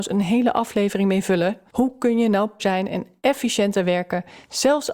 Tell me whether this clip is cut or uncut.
cut